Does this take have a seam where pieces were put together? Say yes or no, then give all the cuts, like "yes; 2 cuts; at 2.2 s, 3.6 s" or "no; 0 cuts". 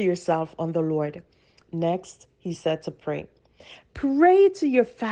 no; 0 cuts